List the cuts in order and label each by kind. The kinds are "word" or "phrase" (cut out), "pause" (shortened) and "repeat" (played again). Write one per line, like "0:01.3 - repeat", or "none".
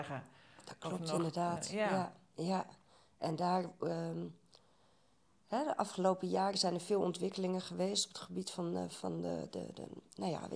0:08.9 - word